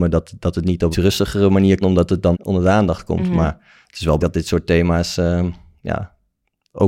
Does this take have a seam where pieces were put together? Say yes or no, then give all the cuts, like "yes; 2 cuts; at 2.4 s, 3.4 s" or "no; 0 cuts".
yes; 4 cuts; at 0.9 s, 1.8 s, 2.3 s, 4.2 s